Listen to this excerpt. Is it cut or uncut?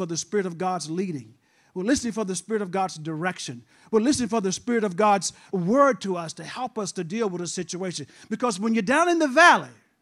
cut